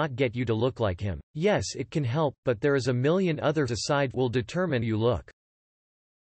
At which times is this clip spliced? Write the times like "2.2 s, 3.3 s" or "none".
1.2 s, 3.7 s, 4.1 s, 4.8 s